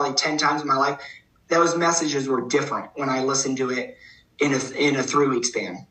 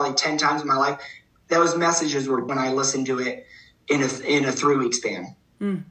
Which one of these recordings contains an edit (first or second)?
second